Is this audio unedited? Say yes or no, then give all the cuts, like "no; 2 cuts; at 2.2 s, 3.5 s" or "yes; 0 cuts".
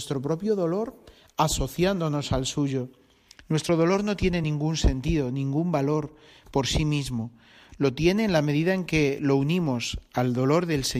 yes; 0 cuts